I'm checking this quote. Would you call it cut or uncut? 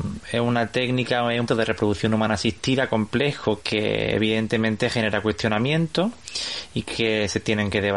cut